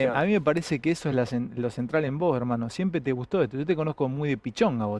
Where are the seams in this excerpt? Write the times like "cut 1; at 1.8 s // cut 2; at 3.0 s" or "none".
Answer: none